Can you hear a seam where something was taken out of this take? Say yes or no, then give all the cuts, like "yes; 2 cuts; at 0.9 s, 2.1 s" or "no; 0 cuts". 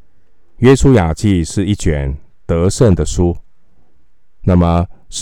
no; 0 cuts